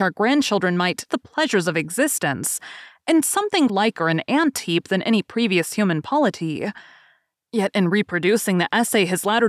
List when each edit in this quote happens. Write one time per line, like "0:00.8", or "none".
0:01.1
0:03.7